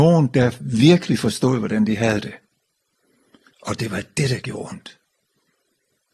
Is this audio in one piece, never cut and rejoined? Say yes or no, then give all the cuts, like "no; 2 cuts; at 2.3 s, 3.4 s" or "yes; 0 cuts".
yes; 0 cuts